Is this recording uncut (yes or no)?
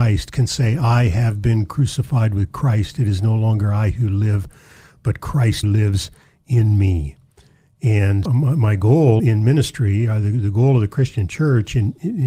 no